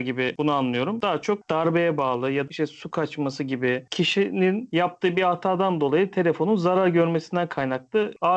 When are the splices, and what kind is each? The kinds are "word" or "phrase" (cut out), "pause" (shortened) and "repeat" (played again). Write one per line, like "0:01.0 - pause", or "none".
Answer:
0:01.4 - word
0:02.5 - word